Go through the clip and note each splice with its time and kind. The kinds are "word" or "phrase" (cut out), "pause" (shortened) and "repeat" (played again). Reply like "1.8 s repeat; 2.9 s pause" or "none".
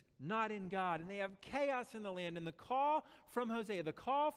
none

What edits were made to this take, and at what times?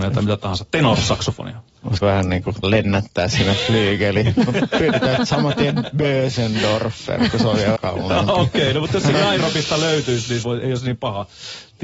2.0 s word; 2.6 s word; 7.8 s word; 9.1 s word; 10.4 s word

